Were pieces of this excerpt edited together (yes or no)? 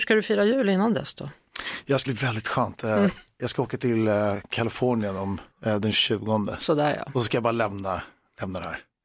yes